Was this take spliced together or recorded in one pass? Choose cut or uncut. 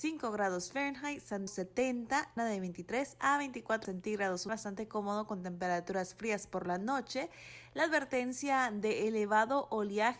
cut